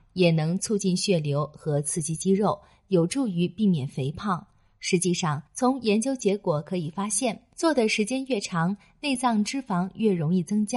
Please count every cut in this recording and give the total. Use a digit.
1